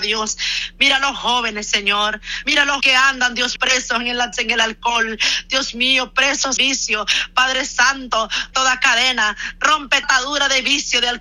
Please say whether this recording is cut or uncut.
cut